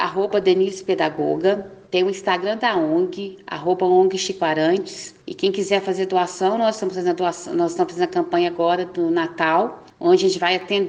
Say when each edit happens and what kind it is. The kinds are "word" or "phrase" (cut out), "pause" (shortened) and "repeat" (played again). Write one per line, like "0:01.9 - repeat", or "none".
none